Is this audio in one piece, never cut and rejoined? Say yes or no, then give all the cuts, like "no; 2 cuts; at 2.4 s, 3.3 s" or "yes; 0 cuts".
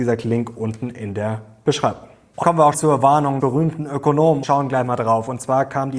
no; 4 cuts; at 2.4 s, 2.7 s, 3.4 s, 4.4 s